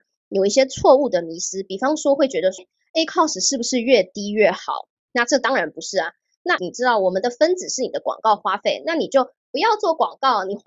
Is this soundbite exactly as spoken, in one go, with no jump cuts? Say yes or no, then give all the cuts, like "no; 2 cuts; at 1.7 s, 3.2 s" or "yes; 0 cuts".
no; 2 cuts; at 2.6 s, 6.6 s